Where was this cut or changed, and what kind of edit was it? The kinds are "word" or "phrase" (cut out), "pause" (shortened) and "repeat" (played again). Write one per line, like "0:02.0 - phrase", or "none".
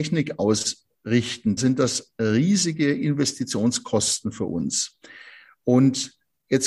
0:01.6 - word